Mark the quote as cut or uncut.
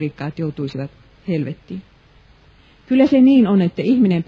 uncut